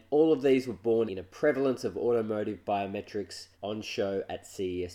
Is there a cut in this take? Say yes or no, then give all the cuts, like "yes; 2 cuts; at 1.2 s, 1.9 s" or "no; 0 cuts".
yes; 2 cuts; at 1.1 s, 3.5 s